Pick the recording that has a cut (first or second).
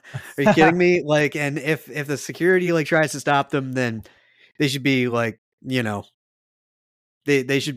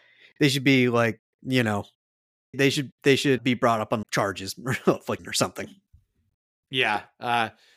second